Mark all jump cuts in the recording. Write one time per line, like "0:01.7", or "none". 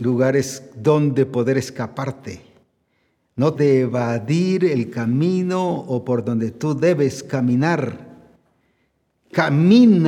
0:03.5